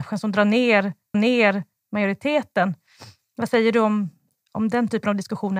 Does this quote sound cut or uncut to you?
cut